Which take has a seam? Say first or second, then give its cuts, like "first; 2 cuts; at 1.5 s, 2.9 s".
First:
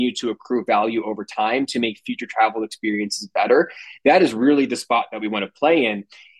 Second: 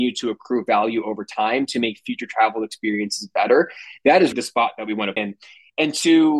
second; 2 cuts; at 4.3 s, 5.2 s